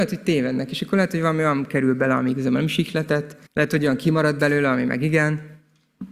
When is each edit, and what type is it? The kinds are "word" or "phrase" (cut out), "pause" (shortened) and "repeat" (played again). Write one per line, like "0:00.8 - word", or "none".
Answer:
0:03.5 - pause